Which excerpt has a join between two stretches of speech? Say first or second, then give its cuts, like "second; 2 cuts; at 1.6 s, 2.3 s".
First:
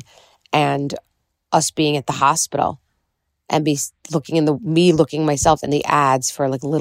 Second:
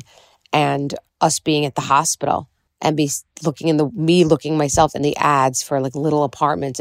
second; 2 cuts; at 1.1 s, 2.7 s